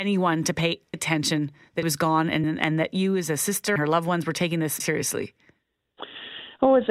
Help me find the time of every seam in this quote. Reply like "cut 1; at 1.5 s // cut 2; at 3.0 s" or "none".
cut 1; at 0.9 s // cut 2; at 1.8 s // cut 3; at 2.4 s // cut 4; at 3.8 s // cut 5; at 4.8 s